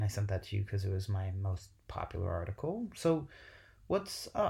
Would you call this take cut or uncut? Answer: uncut